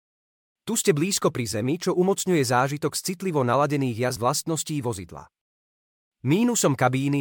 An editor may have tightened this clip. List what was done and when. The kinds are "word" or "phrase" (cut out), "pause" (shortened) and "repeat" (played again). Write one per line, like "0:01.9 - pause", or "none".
0:04.2 - word